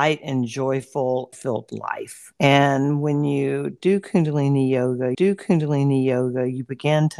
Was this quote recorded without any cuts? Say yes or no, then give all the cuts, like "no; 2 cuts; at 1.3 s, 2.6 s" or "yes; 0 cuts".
no; 2 cuts; at 1.3 s, 5.1 s